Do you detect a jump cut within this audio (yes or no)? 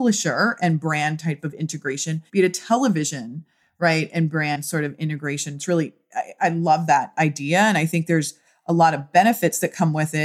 yes